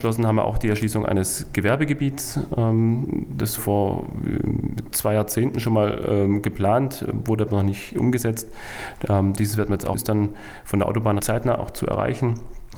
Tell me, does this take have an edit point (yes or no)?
yes